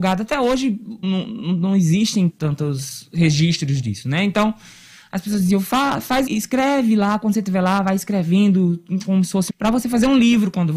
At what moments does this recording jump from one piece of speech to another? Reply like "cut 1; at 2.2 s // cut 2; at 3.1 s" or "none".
cut 1; at 1.0 s // cut 2; at 2.3 s // cut 3; at 6.3 s // cut 4; at 9.5 s